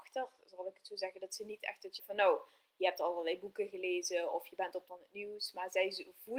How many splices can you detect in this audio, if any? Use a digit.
2